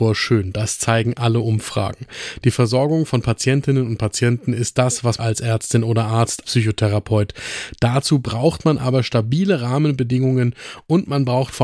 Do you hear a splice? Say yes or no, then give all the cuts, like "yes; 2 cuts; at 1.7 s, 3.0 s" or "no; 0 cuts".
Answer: yes; 2 cuts; at 5.2 s, 6.4 s